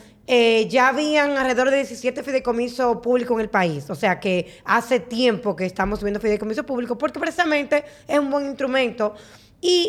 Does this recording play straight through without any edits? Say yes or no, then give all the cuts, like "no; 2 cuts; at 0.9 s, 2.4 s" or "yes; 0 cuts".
yes; 0 cuts